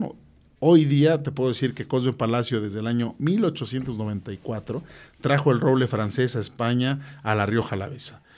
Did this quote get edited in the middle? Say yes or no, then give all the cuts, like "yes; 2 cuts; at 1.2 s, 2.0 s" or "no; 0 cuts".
no; 0 cuts